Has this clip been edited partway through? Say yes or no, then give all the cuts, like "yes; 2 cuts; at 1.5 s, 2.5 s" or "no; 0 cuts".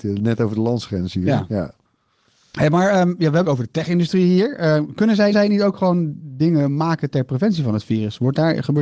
yes; 2 cuts; at 3.4 s, 5.3 s